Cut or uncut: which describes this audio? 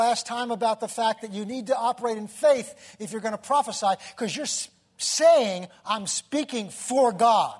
uncut